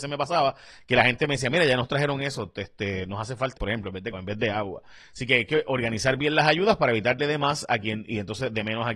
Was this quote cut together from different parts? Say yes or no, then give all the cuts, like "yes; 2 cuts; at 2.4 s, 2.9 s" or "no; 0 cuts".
yes; 3 cuts; at 3.6 s, 4.1 s, 7.2 s